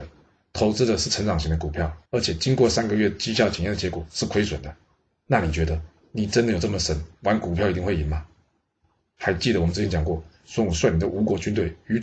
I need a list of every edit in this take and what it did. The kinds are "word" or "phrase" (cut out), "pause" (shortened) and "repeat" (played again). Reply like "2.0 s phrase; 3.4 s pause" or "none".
2.1 s pause